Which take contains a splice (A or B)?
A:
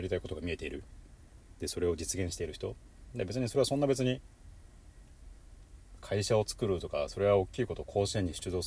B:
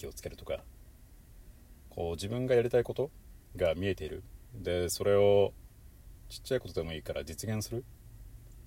A